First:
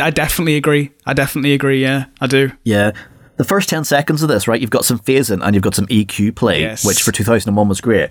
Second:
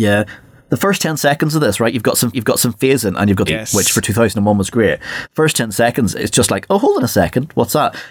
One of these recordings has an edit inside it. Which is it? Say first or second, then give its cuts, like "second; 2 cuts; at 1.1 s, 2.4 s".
second; 2 cuts; at 2.3 s, 3.5 s